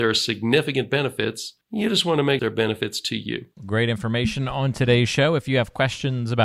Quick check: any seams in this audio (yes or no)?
yes